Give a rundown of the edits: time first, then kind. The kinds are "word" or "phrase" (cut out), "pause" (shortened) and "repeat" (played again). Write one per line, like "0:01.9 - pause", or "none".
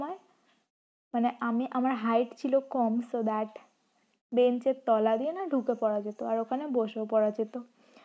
none